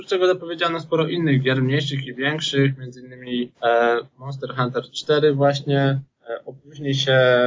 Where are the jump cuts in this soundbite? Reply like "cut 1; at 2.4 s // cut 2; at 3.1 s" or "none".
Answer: cut 1; at 3.5 s // cut 2; at 6.2 s